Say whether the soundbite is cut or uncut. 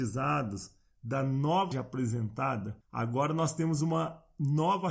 cut